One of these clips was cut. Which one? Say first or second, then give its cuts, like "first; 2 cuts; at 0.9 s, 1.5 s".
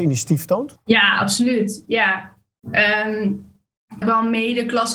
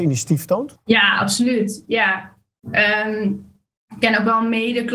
first; 1 cut; at 4.0 s